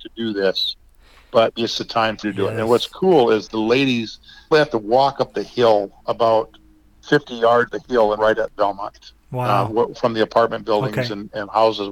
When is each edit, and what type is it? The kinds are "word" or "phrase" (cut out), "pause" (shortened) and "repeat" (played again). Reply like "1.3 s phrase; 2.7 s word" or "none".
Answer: 1.5 s word; 2.2 s word; 3.5 s word; 4.5 s word; 6.9 s word; 7.7 s word; 8.2 s word; 9.9 s word